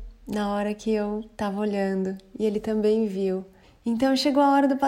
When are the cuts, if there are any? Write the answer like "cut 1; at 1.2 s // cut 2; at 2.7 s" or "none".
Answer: cut 1; at 3.6 s